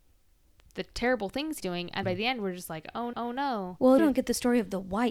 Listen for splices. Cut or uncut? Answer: cut